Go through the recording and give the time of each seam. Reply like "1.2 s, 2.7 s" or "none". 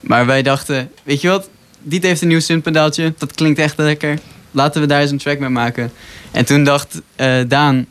none